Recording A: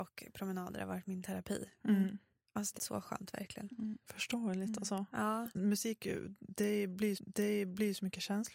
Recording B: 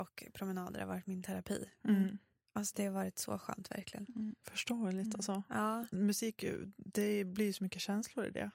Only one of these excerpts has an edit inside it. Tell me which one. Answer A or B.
A